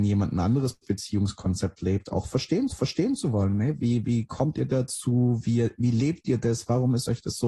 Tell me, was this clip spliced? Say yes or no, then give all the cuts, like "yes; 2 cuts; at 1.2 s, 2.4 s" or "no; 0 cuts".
yes; 1 cut; at 2.7 s